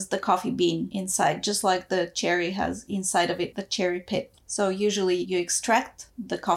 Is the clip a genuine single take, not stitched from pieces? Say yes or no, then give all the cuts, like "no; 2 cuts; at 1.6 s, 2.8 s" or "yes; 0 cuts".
yes; 0 cuts